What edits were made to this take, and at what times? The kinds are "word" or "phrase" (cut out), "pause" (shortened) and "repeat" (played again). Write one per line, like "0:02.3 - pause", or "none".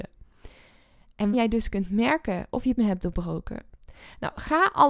0:01.3 - word
0:02.8 - word